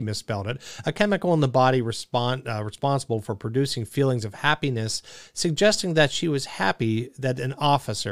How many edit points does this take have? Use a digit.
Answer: 0